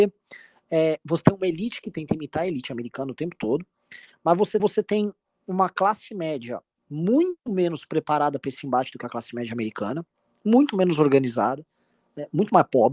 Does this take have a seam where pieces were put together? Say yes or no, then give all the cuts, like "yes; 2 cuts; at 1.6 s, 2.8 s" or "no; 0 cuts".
yes; 1 cut; at 4.6 s